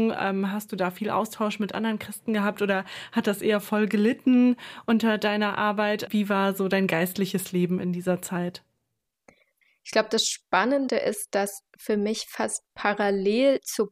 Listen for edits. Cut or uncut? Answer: uncut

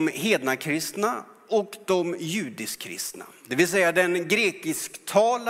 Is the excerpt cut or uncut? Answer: uncut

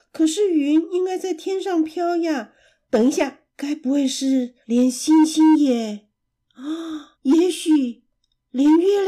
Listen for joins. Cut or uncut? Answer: cut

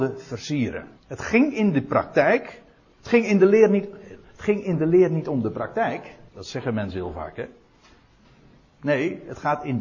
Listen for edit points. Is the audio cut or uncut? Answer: cut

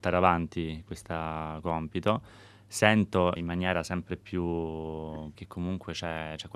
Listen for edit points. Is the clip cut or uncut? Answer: cut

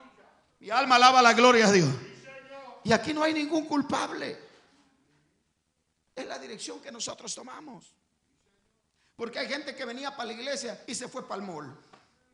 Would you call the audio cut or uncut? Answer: cut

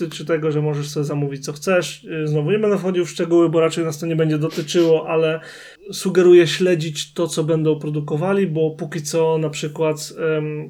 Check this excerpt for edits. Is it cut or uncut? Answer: cut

